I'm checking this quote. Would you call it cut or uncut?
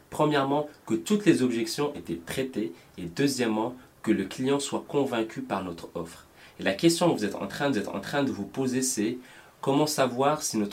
cut